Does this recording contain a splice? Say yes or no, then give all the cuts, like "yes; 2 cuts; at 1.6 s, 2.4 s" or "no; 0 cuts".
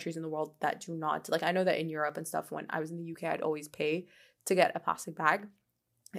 no; 0 cuts